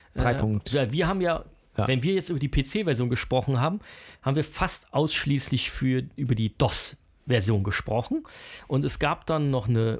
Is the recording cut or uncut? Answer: uncut